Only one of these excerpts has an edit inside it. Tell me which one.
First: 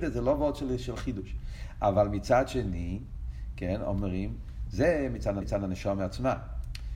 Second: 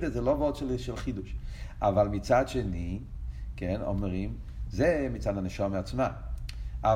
first; 1 cut; at 5.4 s

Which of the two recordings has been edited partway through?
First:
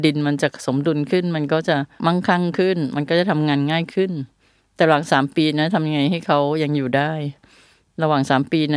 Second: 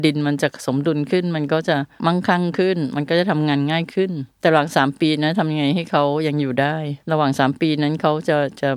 second; 2 cuts; at 4.3 s, 7.0 s

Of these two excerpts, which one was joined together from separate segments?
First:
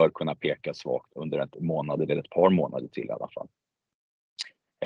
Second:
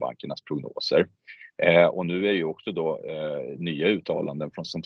first; 3 cuts; at 1.1 s, 1.5 s, 2.1 s

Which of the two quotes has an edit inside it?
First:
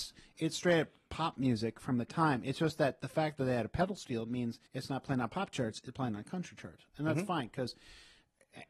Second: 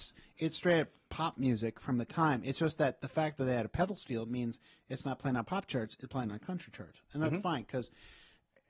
first; 1 cut; at 4.7 s

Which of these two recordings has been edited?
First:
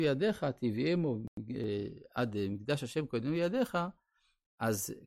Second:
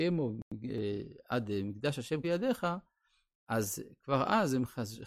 second; 1 cut; at 2.2 s

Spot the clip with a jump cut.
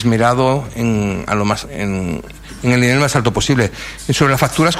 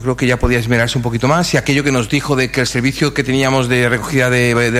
first; 1 cut; at 1.6 s

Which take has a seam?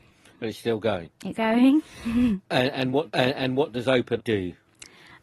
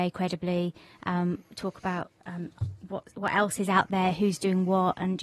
first; 3 cuts; at 1.3 s, 3.1 s, 4.2 s

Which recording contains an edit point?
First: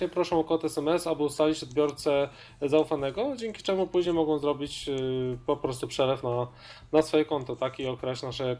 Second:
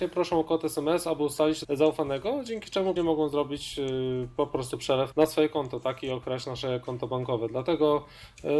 second; 3 cuts; at 1.6 s, 3.0 s, 5.1 s

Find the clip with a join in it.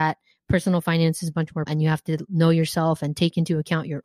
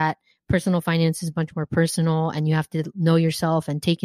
first; 1 cut; at 1.7 s

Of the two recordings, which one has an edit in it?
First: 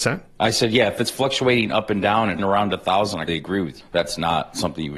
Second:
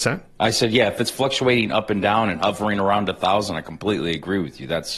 first; 3 cuts; at 2.4 s, 3.3 s, 3.8 s

